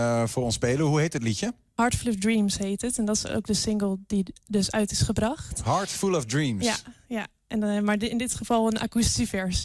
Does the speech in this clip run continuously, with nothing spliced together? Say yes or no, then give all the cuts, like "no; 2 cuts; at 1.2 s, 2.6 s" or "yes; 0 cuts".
yes; 0 cuts